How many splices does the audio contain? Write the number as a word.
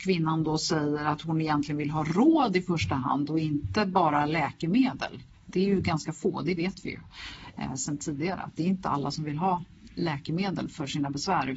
zero